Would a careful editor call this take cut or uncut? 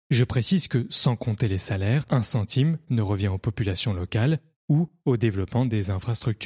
cut